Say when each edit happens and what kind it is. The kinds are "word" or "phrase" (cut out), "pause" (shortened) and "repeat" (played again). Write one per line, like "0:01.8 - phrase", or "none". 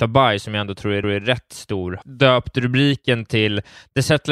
0:01.0 - repeat
0:02.0 - word